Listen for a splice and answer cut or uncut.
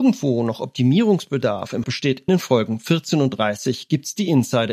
cut